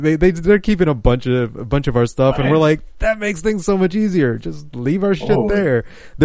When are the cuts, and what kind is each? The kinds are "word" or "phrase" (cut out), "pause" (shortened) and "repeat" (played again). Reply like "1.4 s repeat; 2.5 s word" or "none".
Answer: none